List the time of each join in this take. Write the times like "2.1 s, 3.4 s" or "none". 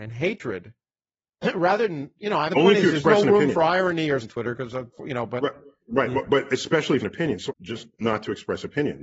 2.5 s, 4.2 s, 7.0 s, 7.5 s